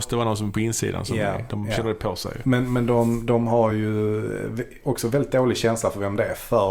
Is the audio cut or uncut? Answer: uncut